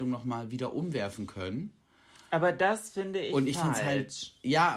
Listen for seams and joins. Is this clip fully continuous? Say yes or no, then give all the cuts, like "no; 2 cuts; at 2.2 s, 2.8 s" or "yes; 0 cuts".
yes; 0 cuts